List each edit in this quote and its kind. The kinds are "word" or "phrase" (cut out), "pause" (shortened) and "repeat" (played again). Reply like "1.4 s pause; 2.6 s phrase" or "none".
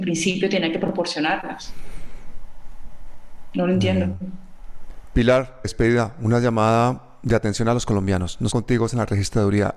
5.6 s word; 8.5 s phrase